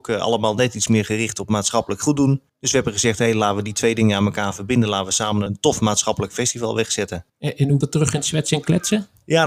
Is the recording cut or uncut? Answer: cut